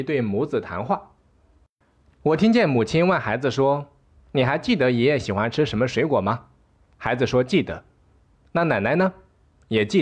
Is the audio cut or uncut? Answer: uncut